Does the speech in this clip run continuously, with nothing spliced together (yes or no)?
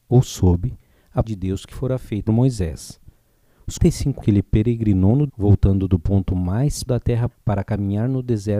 no